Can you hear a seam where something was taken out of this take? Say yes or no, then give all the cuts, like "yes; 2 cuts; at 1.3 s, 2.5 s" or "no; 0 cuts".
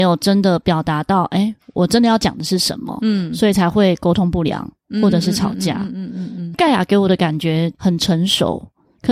no; 0 cuts